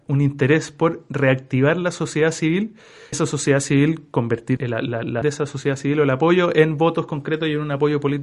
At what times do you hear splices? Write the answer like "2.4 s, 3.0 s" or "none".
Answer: 3.1 s, 4.6 s, 5.2 s